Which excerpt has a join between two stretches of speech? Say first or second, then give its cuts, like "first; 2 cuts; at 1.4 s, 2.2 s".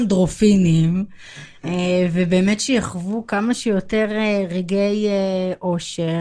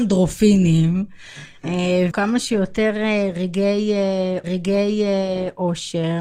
second; 2 cuts; at 2.1 s, 4.4 s